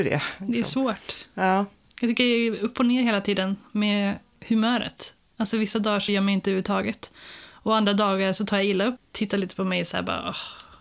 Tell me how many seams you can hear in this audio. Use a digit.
2